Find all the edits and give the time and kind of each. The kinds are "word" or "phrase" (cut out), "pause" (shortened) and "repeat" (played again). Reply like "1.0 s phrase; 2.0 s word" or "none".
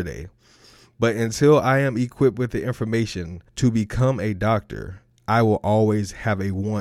3.5 s pause